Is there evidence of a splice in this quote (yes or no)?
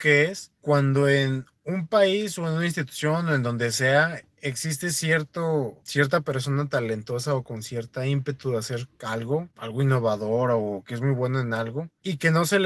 no